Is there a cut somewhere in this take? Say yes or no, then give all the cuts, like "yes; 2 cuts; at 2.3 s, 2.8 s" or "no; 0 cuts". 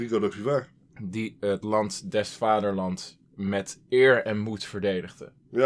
no; 0 cuts